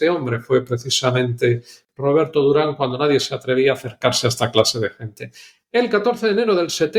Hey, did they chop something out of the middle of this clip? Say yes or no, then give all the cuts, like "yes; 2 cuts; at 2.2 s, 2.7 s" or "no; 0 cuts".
no; 0 cuts